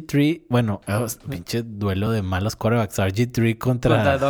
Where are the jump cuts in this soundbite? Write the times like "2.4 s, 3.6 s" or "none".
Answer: none